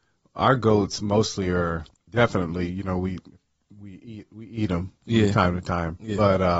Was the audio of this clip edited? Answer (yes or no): yes